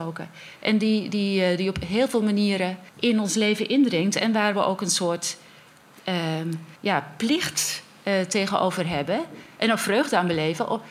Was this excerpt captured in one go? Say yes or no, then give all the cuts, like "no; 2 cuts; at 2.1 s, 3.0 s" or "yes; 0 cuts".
no; 2 cuts; at 2.9 s, 6.8 s